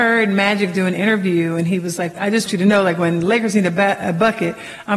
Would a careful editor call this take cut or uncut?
cut